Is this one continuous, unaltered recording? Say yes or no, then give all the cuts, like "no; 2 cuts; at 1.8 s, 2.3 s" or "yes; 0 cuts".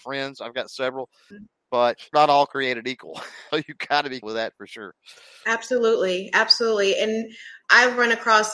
no; 5 cuts; at 1.3 s, 2.1 s, 3.5 s, 4.2 s, 7.6 s